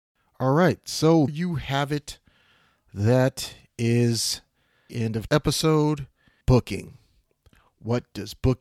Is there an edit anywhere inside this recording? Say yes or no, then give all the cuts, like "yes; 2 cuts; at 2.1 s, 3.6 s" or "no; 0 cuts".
yes; 4 cuts; at 1.3 s, 4.9 s, 5.3 s, 6.4 s